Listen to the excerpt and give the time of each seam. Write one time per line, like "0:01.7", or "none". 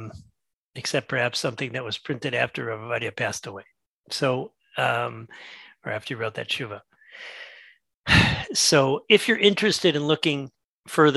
none